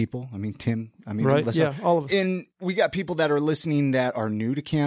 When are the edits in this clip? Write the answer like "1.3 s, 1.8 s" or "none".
1.4 s, 2.5 s